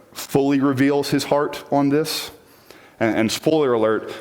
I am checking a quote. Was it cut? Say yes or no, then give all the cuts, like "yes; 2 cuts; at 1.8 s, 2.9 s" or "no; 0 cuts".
no; 0 cuts